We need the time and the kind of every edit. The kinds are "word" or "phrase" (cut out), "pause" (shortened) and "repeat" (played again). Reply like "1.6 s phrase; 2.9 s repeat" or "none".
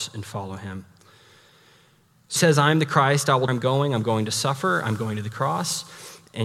2.4 s word; 3.5 s phrase